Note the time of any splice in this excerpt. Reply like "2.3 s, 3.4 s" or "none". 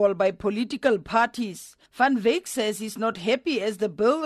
none